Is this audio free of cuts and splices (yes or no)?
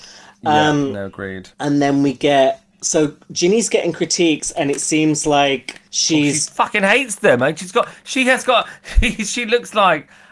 no